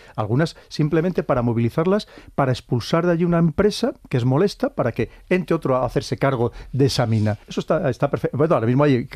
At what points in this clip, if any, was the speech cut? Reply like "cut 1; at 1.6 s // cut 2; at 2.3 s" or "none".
cut 1; at 7.4 s